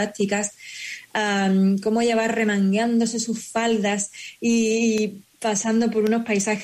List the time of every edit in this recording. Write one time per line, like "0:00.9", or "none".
none